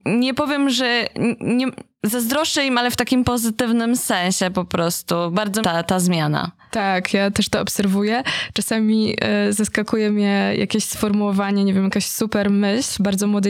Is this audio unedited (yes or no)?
no